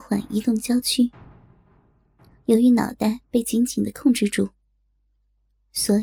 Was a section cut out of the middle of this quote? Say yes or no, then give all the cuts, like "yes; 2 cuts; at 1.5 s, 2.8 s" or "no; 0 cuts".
no; 0 cuts